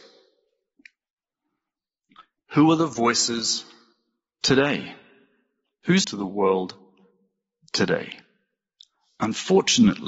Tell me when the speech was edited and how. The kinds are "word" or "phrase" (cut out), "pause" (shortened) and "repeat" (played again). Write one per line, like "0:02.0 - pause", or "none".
0:06.0 - word